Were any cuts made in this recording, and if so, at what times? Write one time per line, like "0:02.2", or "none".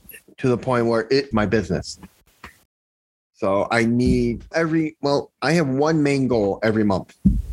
0:01.3
0:02.6
0:04.5